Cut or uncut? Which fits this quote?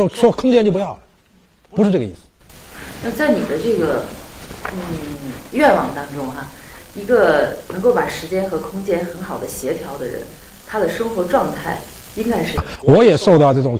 uncut